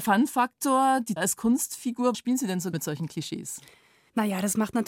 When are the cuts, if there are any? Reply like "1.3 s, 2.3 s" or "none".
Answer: 1.2 s, 2.1 s, 2.7 s